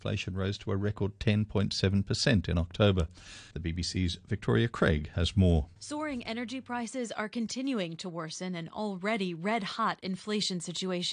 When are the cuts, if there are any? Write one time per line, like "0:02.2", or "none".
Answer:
0:03.5
0:05.8